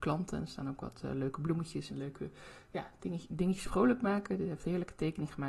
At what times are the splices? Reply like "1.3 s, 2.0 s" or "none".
1.9 s, 3.0 s, 3.6 s